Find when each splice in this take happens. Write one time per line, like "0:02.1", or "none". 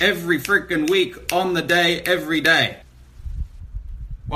none

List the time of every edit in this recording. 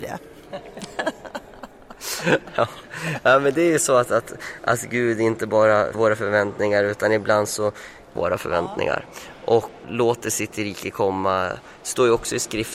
0:05.9
0:08.2
0:09.8

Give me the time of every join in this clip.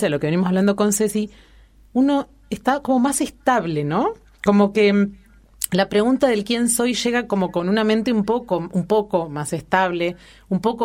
none

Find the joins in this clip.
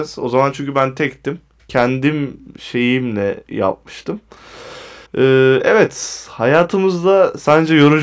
0:05.1

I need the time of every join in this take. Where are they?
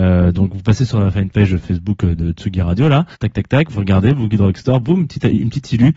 0:03.1

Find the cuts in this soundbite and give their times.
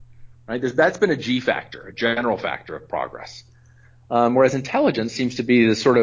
none

